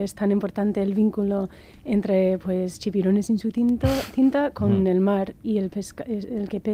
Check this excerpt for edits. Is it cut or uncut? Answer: uncut